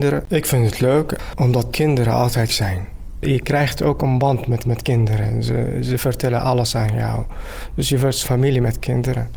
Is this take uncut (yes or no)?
no